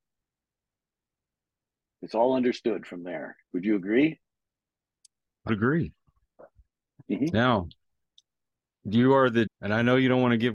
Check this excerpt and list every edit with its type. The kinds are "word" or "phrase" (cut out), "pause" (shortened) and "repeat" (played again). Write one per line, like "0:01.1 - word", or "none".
0:03.4 - pause
0:05.5 - word
0:09.5 - phrase